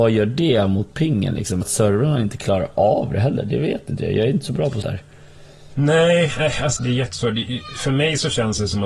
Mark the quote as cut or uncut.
cut